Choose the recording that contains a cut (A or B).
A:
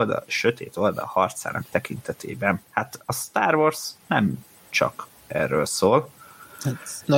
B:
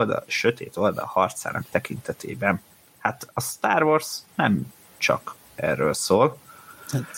A